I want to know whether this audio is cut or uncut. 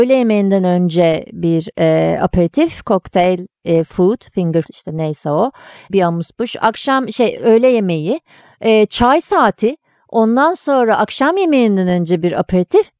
cut